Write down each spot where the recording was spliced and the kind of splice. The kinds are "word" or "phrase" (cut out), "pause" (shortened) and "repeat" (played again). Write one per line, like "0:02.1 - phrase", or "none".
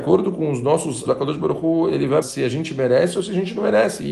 0:01.1 - word
0:02.2 - word